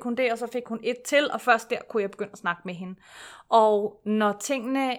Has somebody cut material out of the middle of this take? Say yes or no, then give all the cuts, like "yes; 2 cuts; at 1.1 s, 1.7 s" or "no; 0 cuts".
no; 0 cuts